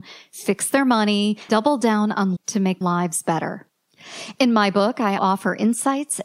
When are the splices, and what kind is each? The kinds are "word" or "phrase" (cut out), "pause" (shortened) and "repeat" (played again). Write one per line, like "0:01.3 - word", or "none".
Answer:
0:01.5 - word
0:02.4 - word
0:02.8 - word
0:05.2 - word